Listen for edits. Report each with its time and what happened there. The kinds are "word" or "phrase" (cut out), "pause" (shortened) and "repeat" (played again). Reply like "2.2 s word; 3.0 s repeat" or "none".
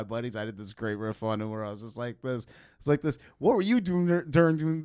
none